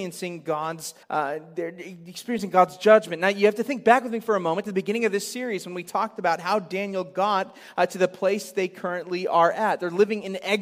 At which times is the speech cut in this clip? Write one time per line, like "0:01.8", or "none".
0:01.0